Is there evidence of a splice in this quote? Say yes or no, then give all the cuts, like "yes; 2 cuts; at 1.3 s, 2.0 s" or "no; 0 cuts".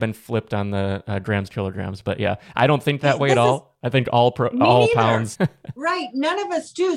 yes; 1 cut; at 5.3 s